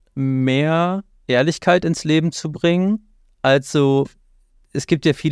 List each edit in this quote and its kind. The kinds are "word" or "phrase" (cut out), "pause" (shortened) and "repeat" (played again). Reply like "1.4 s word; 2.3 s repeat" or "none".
3.2 s pause